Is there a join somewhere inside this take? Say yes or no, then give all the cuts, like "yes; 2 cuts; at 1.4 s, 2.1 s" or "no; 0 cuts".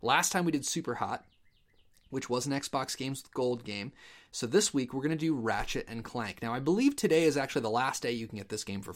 no; 0 cuts